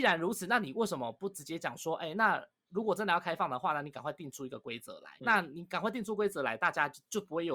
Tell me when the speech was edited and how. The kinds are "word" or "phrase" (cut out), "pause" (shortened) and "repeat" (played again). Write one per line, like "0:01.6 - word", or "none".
0:05.2 - pause